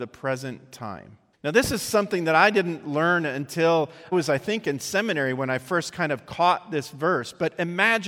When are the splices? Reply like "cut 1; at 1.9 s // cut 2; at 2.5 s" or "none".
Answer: cut 1; at 1.3 s // cut 2; at 4.1 s